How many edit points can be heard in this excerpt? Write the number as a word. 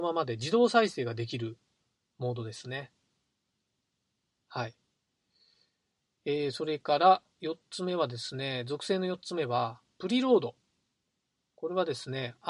zero